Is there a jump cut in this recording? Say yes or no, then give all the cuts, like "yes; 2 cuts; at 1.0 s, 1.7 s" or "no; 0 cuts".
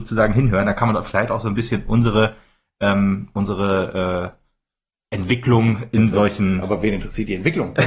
no; 0 cuts